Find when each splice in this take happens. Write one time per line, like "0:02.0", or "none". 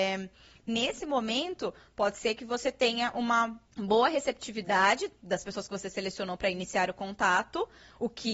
0:03.7